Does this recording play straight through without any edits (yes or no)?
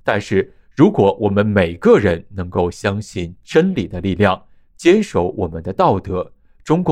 yes